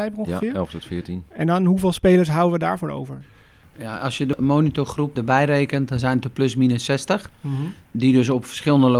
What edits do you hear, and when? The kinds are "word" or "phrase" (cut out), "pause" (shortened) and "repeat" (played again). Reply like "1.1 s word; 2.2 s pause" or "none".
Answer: none